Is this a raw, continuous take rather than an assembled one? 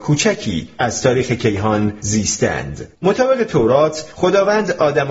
no; 1 cut; at 3.0 s

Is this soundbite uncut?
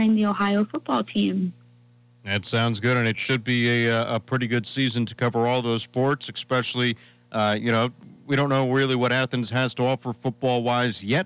yes; 0 cuts

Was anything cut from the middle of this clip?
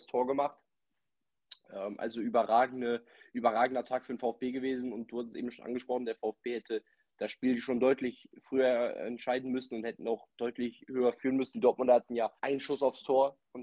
yes; 1 cut; at 12.4 s

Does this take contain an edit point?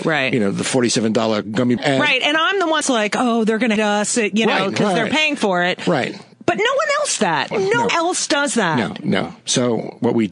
yes; 6 cuts; at 1.8 s, 2.8 s, 3.8 s, 7.2 s, 7.5 s, 7.9 s

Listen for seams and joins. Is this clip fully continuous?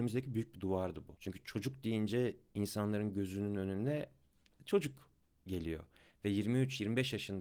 yes; 0 cuts

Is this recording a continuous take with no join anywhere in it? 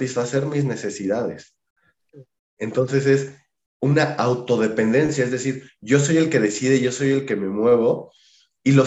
yes; 0 cuts

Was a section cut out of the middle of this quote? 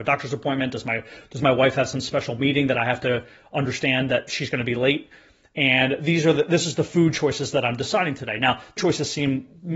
yes; 1 cut; at 8.8 s

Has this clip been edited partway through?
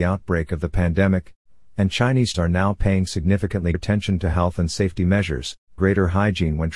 yes; 3 cuts; at 2.3 s, 3.7 s, 5.8 s

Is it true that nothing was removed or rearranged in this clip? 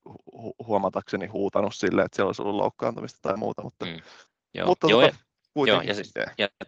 no; 1 cut; at 4.3 s

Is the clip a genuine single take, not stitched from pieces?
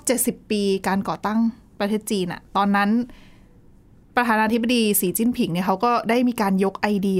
yes; 0 cuts

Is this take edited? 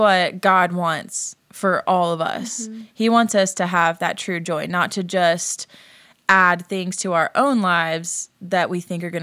no; 0 cuts

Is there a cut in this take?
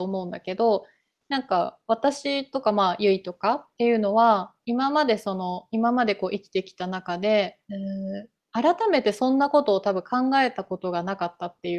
yes; 3 cuts; at 3.7 s, 4.6 s, 7.6 s

